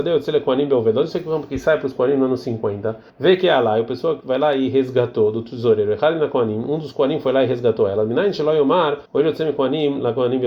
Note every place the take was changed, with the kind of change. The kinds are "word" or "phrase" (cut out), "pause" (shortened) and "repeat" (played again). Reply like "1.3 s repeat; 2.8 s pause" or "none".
3.1 s pause; 9.1 s pause